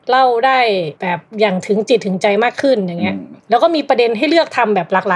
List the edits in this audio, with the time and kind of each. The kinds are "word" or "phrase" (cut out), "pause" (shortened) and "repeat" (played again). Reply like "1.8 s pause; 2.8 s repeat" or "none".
1.0 s pause; 1.3 s pause; 3.4 s pause